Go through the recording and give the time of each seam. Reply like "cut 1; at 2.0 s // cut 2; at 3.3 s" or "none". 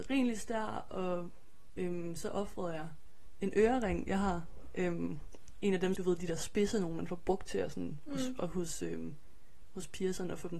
cut 1; at 6.0 s